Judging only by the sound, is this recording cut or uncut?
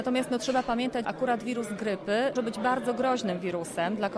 cut